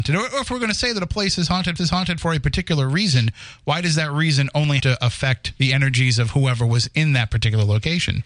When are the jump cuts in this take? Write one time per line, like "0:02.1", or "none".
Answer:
0:01.8
0:04.8
0:05.6

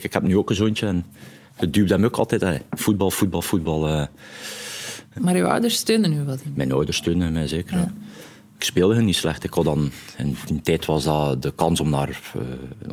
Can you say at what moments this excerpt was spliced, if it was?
none

